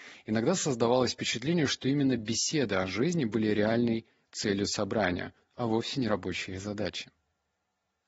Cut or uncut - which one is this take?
uncut